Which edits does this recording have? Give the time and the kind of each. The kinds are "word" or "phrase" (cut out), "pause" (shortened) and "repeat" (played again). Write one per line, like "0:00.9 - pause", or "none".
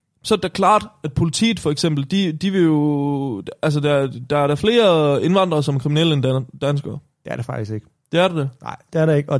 0:08.0 - pause